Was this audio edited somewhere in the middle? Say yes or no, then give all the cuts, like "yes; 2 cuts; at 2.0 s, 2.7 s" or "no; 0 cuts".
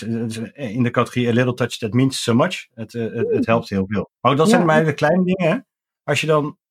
yes; 1 cut; at 4.2 s